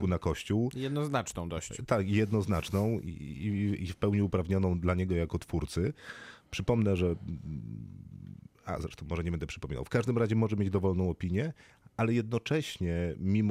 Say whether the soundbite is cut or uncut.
uncut